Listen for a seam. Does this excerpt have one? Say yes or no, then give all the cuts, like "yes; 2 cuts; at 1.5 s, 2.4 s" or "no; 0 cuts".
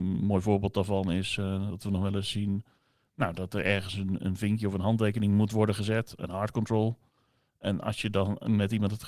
no; 0 cuts